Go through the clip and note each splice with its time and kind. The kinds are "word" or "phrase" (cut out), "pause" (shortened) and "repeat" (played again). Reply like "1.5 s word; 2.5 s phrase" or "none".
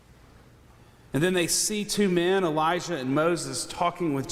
none